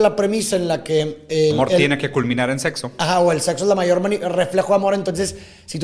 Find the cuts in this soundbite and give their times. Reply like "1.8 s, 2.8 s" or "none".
1.5 s